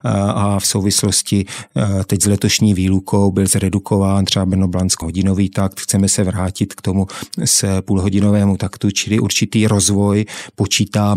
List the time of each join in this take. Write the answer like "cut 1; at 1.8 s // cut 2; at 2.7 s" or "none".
cut 1; at 5.0 s

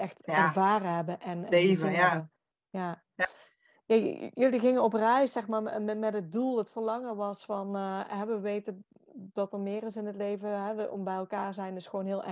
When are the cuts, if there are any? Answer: none

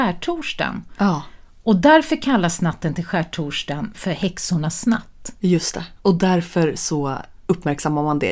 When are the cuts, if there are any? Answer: none

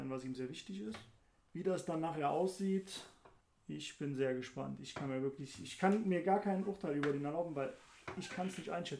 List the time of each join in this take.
none

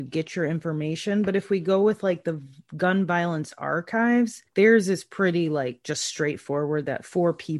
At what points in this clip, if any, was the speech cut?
cut 1; at 4.5 s

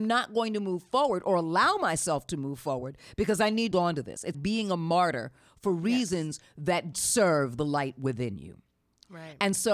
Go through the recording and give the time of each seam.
cut 1; at 3.7 s // cut 2; at 4.3 s // cut 3; at 6.9 s

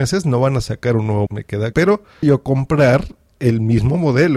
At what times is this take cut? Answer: cut 1; at 1.3 s // cut 2; at 1.7 s // cut 3; at 2.2 s

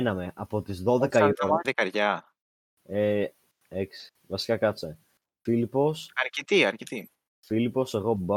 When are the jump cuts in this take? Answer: cut 1; at 1.6 s

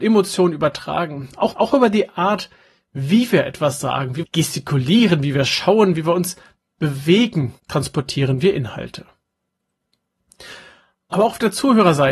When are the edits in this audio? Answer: cut 1; at 1.5 s // cut 2; at 4.2 s // cut 3; at 7.6 s

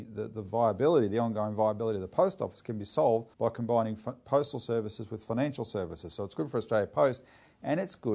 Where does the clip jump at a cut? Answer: cut 1; at 3.3 s

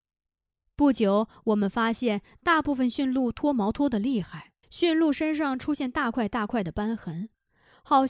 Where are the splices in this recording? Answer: cut 1; at 4.6 s

